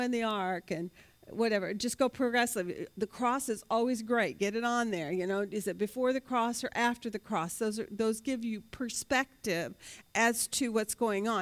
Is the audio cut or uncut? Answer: uncut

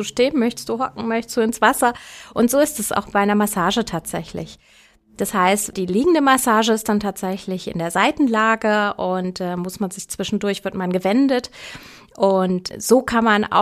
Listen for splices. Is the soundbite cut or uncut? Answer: uncut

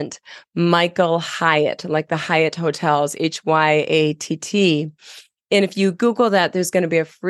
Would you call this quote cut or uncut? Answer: uncut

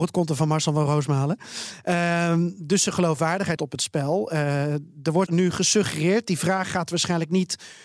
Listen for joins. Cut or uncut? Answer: cut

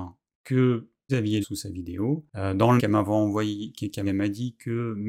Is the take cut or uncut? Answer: cut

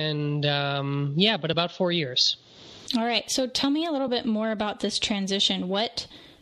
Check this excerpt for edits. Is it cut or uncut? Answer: uncut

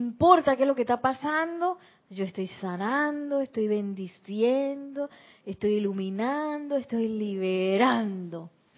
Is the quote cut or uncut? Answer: uncut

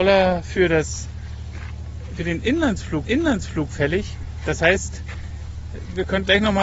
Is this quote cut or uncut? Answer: cut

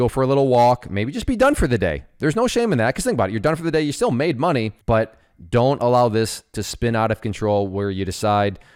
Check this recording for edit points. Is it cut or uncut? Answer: cut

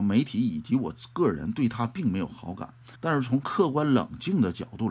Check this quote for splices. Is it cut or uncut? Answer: cut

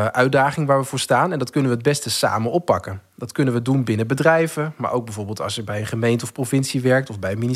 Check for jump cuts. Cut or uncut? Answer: uncut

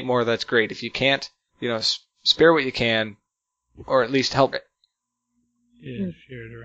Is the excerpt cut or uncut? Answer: cut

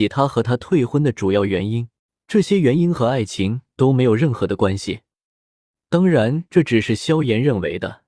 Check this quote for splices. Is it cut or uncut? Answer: cut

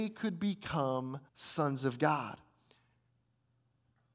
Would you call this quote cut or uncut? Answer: cut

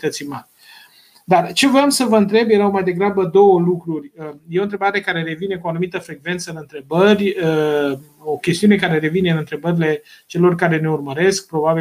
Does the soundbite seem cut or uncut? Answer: uncut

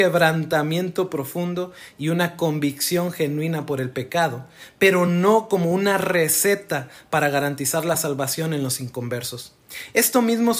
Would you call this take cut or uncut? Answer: uncut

